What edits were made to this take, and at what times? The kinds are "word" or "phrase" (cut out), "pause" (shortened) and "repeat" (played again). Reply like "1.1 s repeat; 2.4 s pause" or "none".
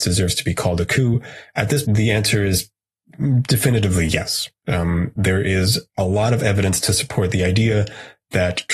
1.8 s word